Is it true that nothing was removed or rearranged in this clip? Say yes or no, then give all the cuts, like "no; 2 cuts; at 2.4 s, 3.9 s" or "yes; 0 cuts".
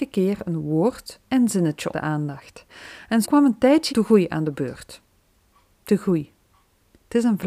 no; 4 cuts; at 1.3 s, 1.9 s, 3.2 s, 3.9 s